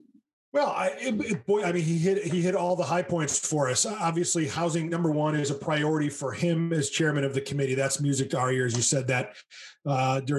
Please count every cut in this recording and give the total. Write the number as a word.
zero